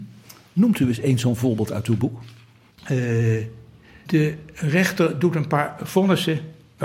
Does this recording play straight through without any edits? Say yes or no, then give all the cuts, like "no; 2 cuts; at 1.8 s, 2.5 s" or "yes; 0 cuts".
yes; 0 cuts